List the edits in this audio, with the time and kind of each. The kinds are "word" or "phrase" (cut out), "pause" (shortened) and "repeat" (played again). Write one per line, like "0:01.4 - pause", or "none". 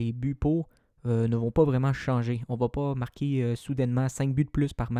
none